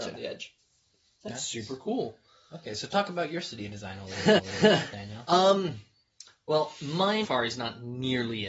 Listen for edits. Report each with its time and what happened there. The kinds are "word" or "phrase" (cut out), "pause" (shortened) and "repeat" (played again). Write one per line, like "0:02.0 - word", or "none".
0:04.4 - repeat
0:07.2 - phrase